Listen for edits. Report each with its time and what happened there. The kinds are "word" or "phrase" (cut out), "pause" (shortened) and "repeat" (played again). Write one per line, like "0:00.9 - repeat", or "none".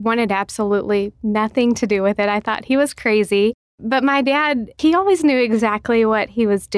none